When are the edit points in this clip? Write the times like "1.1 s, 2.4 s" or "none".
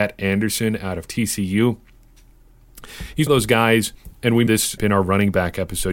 3.3 s, 4.5 s, 4.8 s